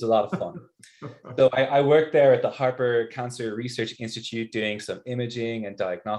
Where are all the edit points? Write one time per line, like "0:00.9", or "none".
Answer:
none